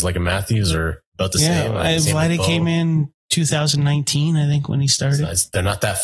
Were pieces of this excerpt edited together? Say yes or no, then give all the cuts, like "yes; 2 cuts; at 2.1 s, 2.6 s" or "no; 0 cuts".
yes; 2 cuts; at 1.1 s, 3.2 s